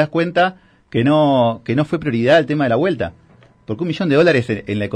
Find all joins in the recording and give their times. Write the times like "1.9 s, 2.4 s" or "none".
none